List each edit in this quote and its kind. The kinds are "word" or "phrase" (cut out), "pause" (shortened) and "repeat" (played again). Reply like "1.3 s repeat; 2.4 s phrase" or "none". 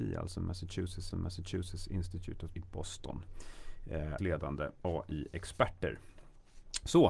1.1 s repeat; 2.5 s word; 4.2 s phrase